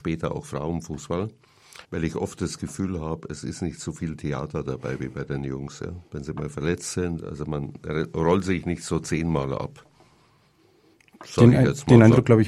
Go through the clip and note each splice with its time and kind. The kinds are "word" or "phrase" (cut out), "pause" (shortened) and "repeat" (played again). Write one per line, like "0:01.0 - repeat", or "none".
0:01.8 - pause